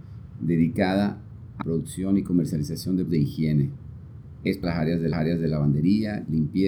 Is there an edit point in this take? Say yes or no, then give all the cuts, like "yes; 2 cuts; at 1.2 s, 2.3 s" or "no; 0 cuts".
yes; 4 cuts; at 1.6 s, 3.1 s, 4.6 s, 5.1 s